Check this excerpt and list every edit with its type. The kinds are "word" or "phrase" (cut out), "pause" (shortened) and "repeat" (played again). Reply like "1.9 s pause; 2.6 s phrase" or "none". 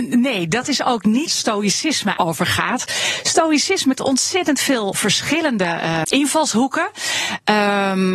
1.3 s word; 2.2 s word; 4.0 s word; 4.9 s word; 6.0 s word